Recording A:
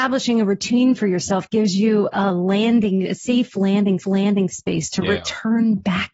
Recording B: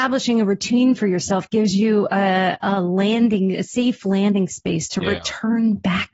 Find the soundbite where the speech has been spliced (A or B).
A